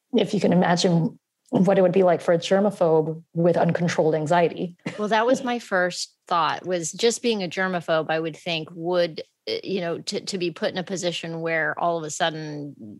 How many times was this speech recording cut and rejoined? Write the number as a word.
zero